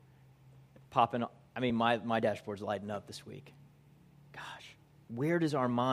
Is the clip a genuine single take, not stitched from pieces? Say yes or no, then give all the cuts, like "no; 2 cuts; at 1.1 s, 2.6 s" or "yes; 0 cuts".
yes; 0 cuts